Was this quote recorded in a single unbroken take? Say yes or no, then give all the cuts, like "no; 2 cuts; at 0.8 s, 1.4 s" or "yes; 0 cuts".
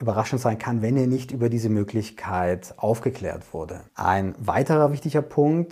no; 1 cut; at 3.9 s